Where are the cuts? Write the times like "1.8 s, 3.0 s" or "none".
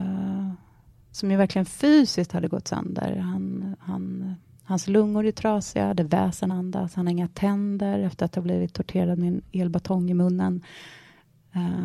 6.5 s